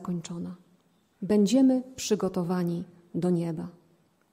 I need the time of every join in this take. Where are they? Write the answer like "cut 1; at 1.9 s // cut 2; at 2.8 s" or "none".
none